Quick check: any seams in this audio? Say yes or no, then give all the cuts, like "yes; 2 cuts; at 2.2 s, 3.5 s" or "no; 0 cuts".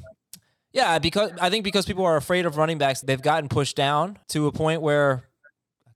yes; 2 cuts; at 3.0 s, 4.2 s